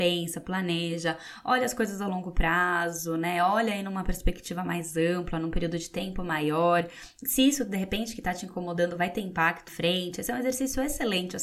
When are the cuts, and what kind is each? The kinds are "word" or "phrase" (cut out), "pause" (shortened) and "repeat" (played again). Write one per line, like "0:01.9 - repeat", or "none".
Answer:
0:09.7 - phrase